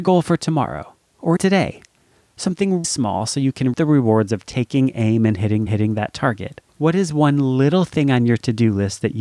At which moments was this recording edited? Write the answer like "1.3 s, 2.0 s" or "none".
1.4 s, 2.8 s, 3.7 s, 5.7 s, 6.7 s

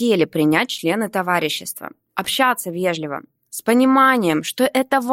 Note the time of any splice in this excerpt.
none

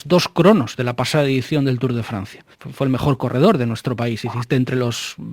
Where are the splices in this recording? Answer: 2.5 s

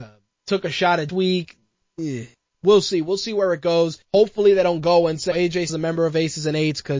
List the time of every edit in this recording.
1.1 s, 2.3 s, 4.0 s, 5.3 s, 5.7 s

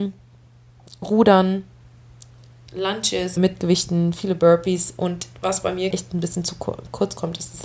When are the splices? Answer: 3.4 s, 5.4 s, 5.9 s

